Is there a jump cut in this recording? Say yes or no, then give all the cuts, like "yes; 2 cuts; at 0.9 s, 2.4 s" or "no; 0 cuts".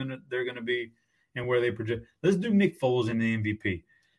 no; 0 cuts